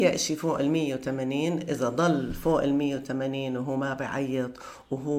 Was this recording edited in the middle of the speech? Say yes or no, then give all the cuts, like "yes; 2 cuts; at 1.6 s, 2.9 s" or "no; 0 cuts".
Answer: no; 0 cuts